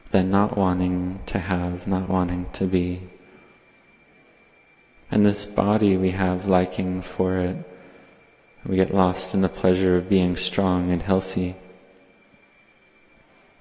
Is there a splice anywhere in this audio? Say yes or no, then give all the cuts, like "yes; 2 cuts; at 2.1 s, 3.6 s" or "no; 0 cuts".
no; 0 cuts